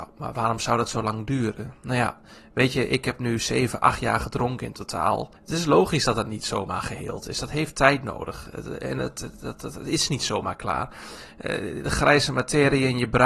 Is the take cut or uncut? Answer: cut